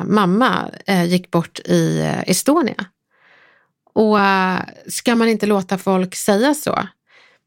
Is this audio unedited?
yes; 0 cuts

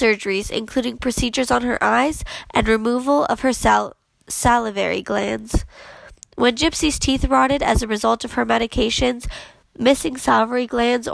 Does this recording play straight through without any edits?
yes; 0 cuts

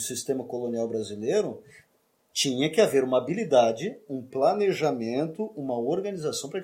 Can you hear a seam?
no; 0 cuts

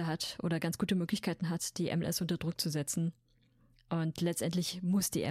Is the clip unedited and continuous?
yes; 0 cuts

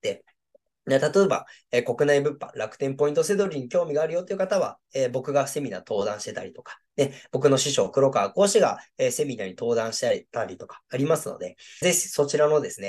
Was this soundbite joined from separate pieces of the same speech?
yes; 1 cut; at 11.8 s

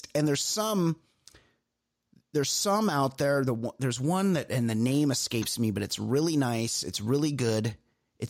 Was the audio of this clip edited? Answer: no; 0 cuts

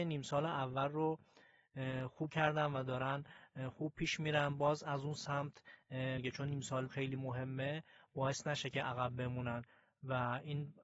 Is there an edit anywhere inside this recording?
yes; 3 cuts; at 2.3 s, 6.2 s, 6.9 s

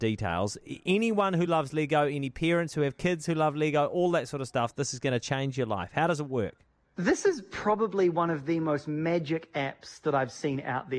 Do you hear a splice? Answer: no; 0 cuts

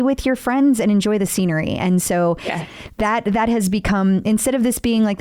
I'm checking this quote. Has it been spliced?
no; 0 cuts

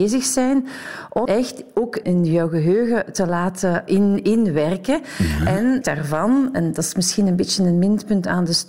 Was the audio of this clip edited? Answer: yes; 4 cuts; at 1.3 s, 2.0 s, 3.9 s, 5.8 s

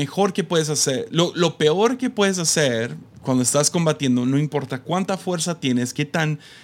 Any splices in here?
no; 0 cuts

